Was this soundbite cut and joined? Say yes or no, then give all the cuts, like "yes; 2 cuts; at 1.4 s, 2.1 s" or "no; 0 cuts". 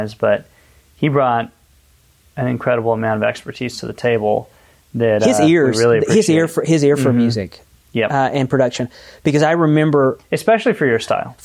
no; 0 cuts